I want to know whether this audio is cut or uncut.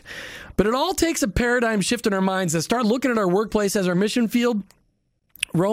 uncut